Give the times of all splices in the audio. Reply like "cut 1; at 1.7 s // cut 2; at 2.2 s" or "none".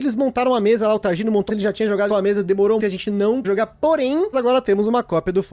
cut 1; at 1.5 s // cut 2; at 2.1 s // cut 3; at 2.8 s // cut 4; at 3.4 s // cut 5; at 4.3 s